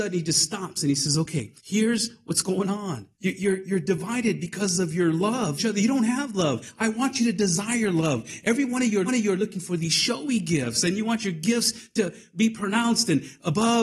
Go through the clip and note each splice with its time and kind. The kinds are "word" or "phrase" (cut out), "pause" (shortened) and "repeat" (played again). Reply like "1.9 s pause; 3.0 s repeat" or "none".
1.6 s pause; 3.1 s pause; 5.6 s phrase; 9.1 s repeat